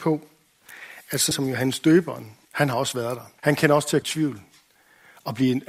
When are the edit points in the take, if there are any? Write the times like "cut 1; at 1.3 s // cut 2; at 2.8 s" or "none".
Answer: cut 1; at 1.3 s // cut 2; at 2.4 s // cut 3; at 3.4 s // cut 4; at 4.0 s